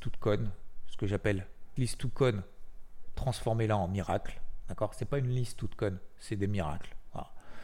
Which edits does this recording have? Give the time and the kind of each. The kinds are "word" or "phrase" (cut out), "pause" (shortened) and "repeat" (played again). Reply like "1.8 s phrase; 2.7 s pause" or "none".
1.8 s word